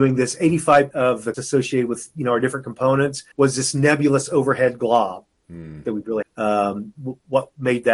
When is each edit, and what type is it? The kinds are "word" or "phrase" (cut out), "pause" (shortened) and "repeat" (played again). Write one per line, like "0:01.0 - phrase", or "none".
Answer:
0:00.9 - word
0:01.3 - word
0:03.3 - pause
0:06.2 - phrase